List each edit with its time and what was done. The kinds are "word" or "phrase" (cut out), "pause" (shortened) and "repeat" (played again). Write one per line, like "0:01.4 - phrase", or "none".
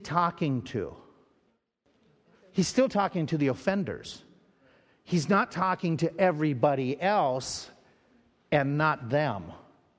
none